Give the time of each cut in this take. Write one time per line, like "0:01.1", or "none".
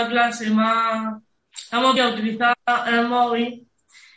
0:02.0